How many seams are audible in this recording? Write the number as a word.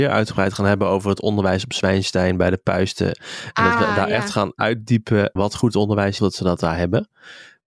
two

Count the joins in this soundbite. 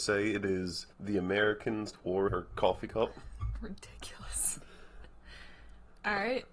three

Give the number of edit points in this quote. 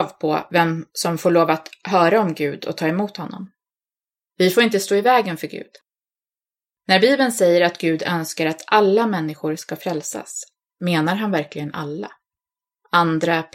zero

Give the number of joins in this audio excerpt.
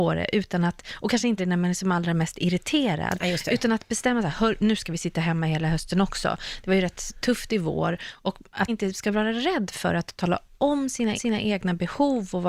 three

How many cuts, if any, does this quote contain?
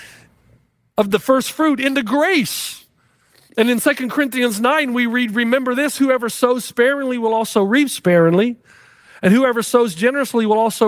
zero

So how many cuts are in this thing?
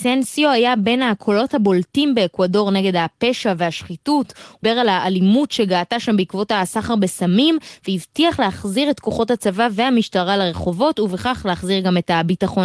one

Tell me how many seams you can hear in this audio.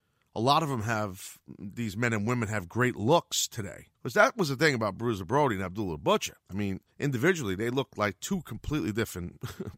three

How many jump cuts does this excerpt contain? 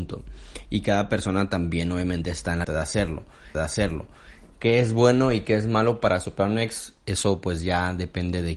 two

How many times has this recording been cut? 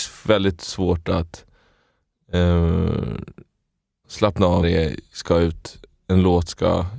two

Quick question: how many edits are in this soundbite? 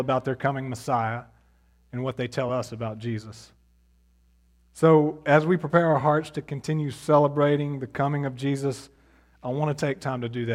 zero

